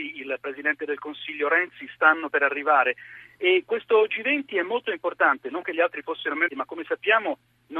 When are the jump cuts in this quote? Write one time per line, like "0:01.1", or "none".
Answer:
0:06.5

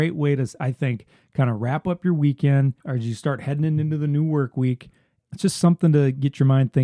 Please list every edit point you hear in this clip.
0:02.8
0:05.2

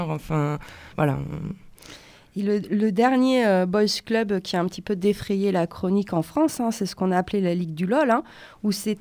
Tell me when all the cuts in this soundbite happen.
0:00.9

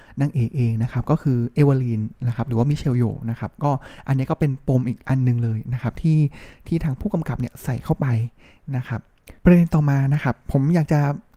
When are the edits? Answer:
0:09.4

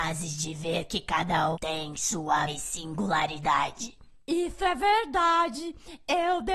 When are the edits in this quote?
0:01.5
0:02.5

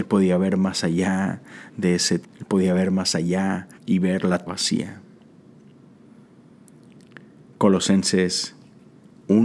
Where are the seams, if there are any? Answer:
0:01.7
0:02.2
0:03.7
0:04.5

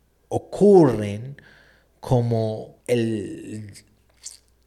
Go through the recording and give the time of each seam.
0:02.8

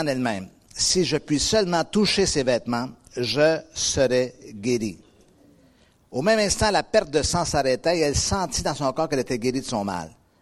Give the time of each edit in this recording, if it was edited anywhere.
none

